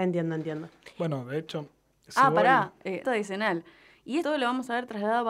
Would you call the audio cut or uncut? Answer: cut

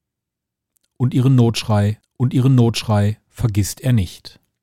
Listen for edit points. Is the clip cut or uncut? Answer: cut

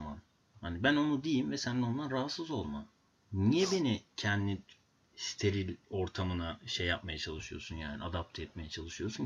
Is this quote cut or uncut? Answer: uncut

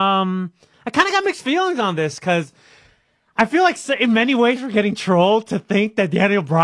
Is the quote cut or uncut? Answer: uncut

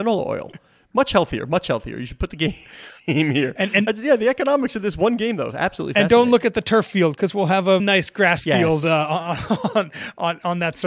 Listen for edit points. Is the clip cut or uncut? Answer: cut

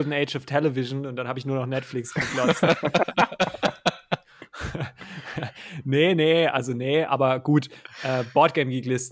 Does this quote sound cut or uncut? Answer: uncut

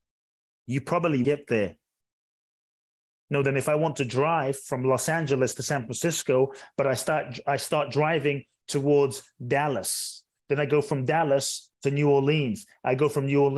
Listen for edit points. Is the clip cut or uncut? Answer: cut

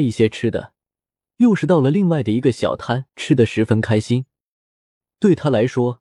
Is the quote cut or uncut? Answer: cut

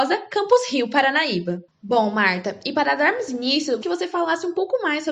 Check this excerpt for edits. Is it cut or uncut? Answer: cut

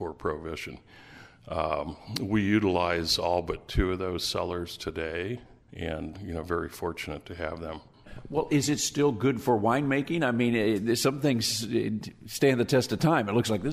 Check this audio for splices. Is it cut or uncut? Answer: cut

